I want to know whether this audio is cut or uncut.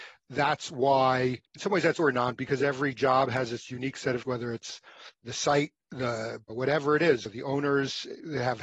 cut